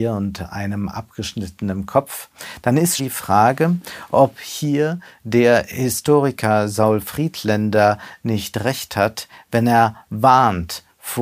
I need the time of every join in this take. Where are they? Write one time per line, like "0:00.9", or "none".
0:03.0